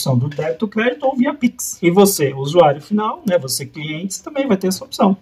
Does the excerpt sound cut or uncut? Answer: uncut